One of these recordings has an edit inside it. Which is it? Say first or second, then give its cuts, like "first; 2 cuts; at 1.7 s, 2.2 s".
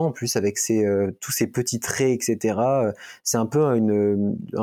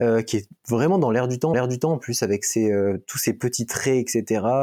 second; 1 cut; at 1.5 s